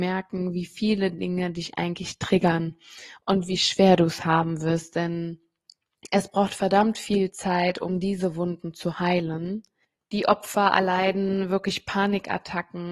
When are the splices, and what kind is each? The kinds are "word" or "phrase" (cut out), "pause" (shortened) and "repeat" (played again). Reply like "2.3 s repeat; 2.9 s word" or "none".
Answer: 9.8 s pause